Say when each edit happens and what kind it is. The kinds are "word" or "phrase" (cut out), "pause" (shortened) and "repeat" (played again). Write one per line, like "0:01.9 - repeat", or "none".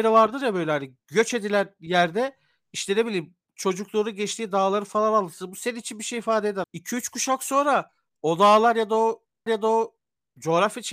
0:06.6 - word
0:09.5 - repeat